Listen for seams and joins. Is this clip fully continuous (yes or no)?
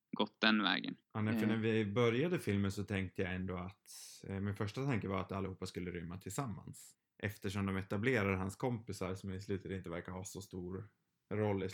no